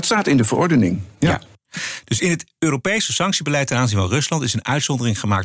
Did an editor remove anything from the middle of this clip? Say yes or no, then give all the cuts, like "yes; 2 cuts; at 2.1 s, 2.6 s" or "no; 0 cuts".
no; 0 cuts